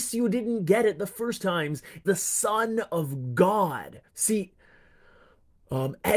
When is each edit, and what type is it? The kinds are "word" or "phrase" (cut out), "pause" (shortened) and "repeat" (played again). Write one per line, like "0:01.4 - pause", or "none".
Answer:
0:01.4 - word
0:02.0 - word
0:04.1 - pause